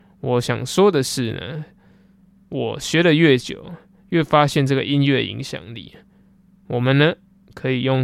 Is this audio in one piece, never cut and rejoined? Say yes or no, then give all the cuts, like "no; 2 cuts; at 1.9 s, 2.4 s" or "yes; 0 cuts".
yes; 0 cuts